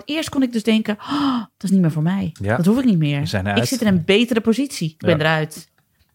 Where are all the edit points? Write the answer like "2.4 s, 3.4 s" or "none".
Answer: none